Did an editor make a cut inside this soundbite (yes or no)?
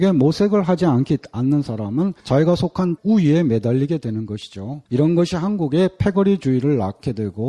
yes